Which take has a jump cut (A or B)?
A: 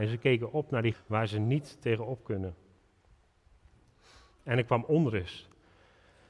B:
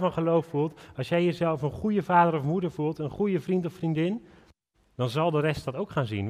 A